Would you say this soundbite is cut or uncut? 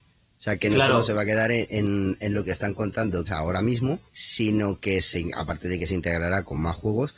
cut